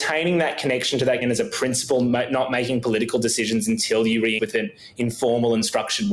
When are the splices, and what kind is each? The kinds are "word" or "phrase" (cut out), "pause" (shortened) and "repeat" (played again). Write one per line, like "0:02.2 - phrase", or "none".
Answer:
0:01.2 - word
0:04.4 - word